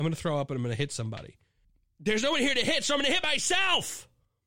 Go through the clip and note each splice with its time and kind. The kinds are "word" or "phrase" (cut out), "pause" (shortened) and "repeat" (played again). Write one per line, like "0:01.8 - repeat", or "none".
0:01.6 - pause